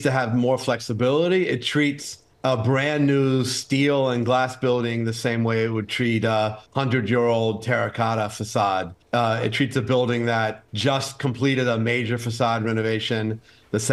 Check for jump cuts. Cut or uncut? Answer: cut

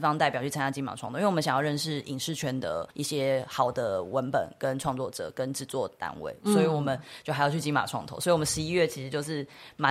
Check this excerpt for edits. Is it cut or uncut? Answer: cut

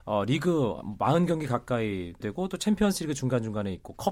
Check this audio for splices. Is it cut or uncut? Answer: cut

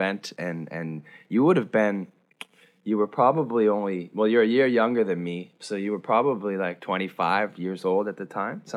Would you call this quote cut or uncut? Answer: uncut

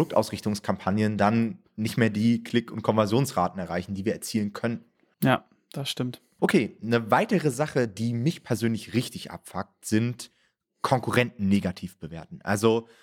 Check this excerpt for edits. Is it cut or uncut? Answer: uncut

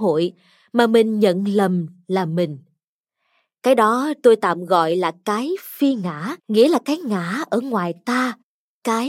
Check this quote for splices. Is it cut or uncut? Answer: cut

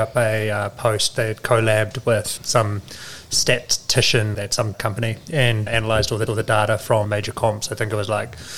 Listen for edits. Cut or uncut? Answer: cut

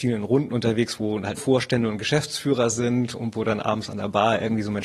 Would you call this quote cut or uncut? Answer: cut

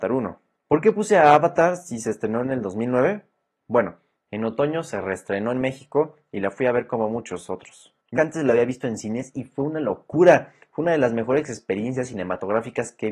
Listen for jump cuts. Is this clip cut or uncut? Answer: cut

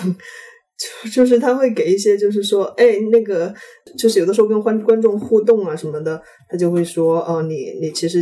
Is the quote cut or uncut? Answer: uncut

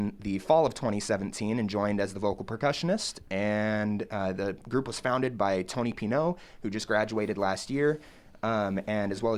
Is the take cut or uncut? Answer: uncut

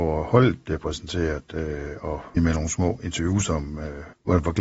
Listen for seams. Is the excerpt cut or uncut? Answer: cut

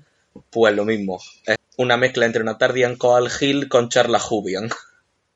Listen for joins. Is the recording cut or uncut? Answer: cut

